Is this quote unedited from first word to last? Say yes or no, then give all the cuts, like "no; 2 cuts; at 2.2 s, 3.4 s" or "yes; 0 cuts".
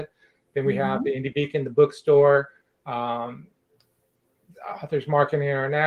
yes; 0 cuts